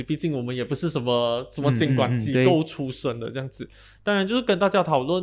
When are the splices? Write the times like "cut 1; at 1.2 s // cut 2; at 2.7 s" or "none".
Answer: none